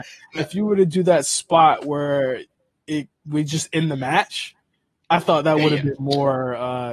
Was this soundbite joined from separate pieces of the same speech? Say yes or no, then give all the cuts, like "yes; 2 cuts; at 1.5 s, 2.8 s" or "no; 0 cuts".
no; 0 cuts